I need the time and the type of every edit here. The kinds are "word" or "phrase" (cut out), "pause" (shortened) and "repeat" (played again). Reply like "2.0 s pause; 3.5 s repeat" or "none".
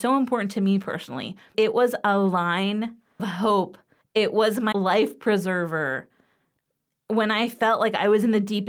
1.5 s word; 3.2 s word; 4.0 s pause; 4.7 s word